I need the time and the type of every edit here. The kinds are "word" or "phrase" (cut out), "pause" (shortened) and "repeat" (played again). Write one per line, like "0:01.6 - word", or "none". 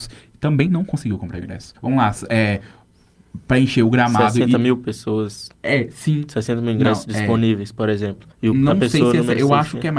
0:01.8 - pause
0:05.5 - pause
0:08.3 - pause